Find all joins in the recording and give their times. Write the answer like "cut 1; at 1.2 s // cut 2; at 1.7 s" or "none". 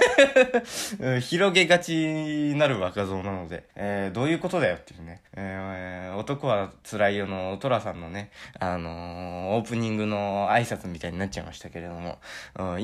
cut 1; at 3.7 s // cut 2; at 5.3 s